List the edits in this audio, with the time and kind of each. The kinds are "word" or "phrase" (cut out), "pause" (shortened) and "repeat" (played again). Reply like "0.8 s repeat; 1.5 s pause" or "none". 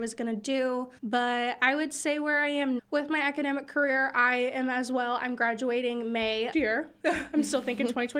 1.0 s pause; 2.8 s word; 6.5 s phrase